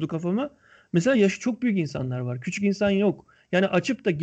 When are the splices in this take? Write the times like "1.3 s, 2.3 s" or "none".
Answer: none

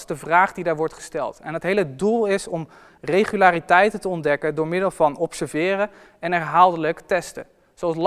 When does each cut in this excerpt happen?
none

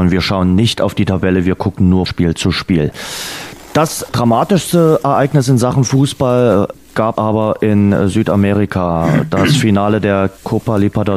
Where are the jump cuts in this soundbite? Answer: 2.1 s, 7.1 s

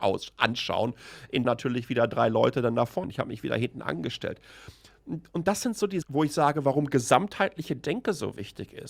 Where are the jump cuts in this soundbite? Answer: 1.4 s, 3.0 s, 6.0 s

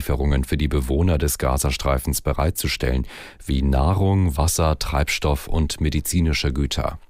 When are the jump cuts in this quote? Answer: none

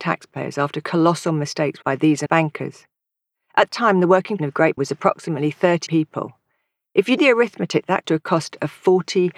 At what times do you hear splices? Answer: 1.8 s, 2.3 s, 3.7 s, 4.4 s, 4.8 s, 5.9 s, 7.2 s, 8.0 s

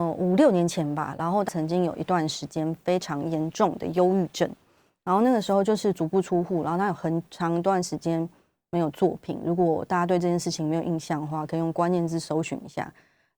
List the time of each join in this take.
1.5 s

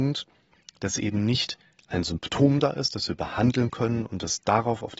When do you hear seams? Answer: none

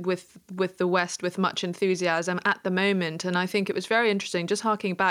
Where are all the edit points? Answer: none

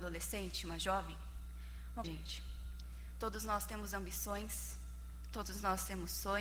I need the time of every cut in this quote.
2.0 s

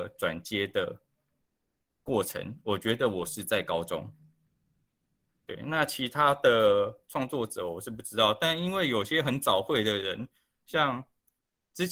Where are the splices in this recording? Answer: none

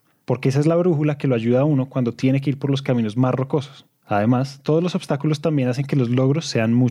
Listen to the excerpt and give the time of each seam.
none

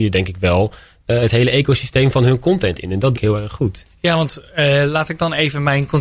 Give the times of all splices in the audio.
3.1 s

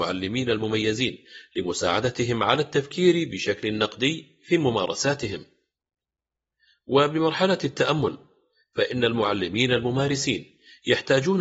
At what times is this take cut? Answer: none

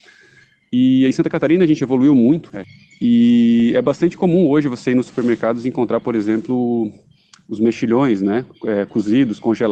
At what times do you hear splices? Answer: none

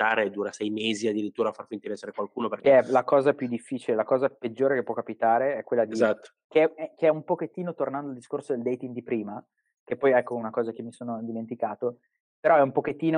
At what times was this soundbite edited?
none

